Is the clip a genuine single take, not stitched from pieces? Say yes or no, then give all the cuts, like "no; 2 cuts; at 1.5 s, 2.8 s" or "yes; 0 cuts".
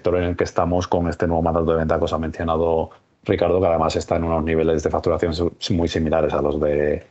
yes; 0 cuts